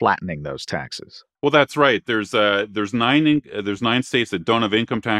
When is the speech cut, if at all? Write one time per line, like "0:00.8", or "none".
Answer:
0:01.4